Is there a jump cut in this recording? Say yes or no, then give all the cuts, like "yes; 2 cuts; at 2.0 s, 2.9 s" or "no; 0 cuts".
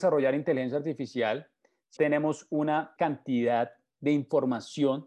yes; 2 cuts; at 2.0 s, 3.0 s